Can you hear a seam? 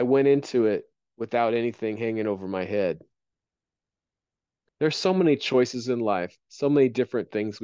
no; 0 cuts

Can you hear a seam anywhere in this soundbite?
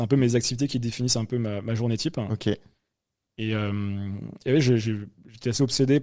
no; 0 cuts

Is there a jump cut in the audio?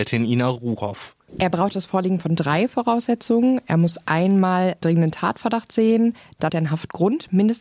yes; 2 cuts; at 4.8 s, 6.5 s

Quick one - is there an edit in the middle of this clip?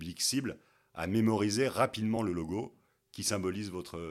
no; 0 cuts

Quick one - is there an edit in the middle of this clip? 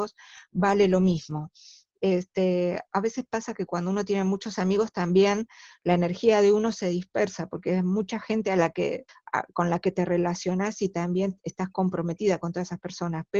yes; 1 cut; at 9.1 s

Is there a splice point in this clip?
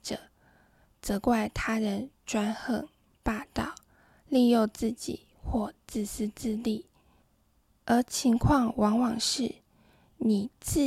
no; 0 cuts

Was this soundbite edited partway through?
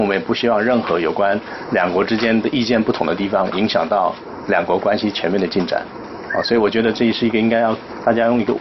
no; 0 cuts

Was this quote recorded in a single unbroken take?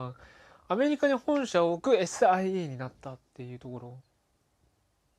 yes; 0 cuts

